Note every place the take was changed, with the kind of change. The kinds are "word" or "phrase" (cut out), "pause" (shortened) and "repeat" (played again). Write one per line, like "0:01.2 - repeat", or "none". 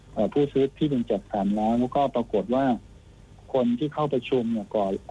none